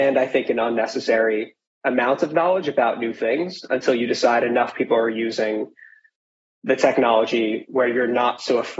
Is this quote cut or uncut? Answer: uncut